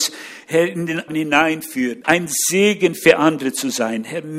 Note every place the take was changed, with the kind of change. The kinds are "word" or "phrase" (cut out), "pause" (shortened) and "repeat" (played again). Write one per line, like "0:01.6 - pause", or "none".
0:01.1 - word
0:02.0 - word